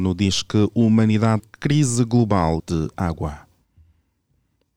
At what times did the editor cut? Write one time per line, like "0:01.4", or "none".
0:01.4
0:02.6